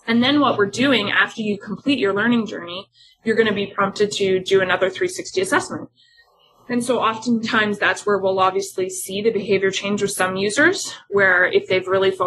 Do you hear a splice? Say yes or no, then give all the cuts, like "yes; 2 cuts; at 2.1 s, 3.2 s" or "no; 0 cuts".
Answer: no; 0 cuts